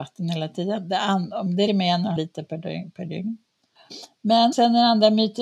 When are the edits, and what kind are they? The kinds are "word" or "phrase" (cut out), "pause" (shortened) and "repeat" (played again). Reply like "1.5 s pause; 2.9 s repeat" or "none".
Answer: 1.7 s word; 2.2 s word; 4.5 s word